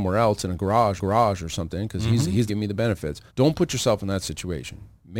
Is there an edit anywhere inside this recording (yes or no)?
yes